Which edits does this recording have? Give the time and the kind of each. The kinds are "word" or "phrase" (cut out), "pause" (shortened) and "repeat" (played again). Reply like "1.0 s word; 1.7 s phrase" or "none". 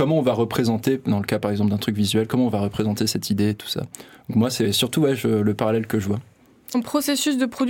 6.7 s word